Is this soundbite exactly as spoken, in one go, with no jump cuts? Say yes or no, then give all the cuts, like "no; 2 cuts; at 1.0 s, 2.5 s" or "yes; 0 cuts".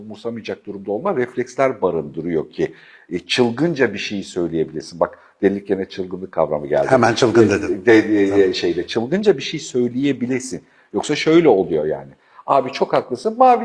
yes; 0 cuts